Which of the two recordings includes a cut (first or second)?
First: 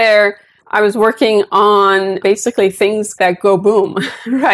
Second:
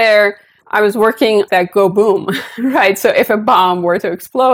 second